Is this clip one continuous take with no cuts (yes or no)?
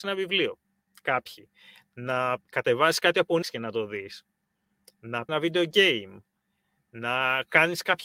no